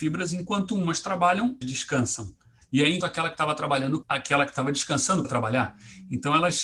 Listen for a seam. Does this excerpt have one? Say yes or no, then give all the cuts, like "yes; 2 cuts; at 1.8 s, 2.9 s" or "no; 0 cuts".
yes; 4 cuts; at 1.6 s, 3.0 s, 4.0 s, 5.2 s